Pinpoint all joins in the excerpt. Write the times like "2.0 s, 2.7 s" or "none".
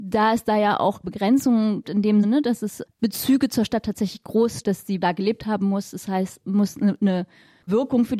1.0 s, 1.8 s, 2.2 s, 2.9 s, 4.6 s, 5.0 s, 6.4 s